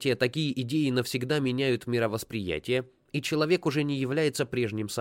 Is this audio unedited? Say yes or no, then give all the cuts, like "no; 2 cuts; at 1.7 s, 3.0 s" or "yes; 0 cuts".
yes; 0 cuts